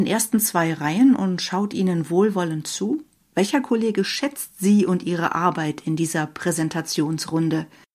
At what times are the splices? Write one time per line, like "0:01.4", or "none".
0:03.2